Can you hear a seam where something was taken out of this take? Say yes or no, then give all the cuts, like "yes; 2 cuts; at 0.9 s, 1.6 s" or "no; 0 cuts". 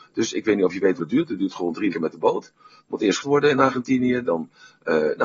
yes; 3 cuts; at 1.0 s, 1.9 s, 3.2 s